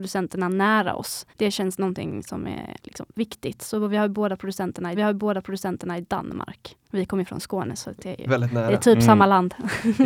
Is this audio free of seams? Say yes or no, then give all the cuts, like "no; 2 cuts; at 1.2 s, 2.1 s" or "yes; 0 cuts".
no; 4 cuts; at 1.3 s, 4.9 s, 6.8 s, 8.3 s